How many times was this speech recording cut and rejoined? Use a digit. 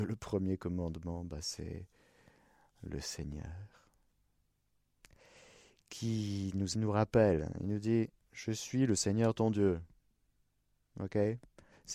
1